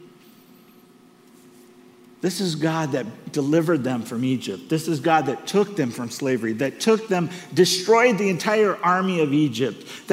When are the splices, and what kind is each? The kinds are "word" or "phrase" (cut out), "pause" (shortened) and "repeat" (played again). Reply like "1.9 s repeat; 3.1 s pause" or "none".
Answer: none